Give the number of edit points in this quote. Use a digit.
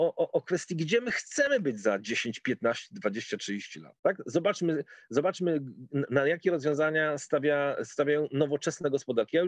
1